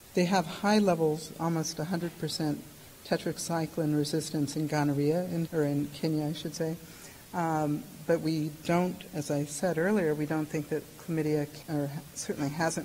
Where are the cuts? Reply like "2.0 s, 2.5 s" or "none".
5.5 s, 11.6 s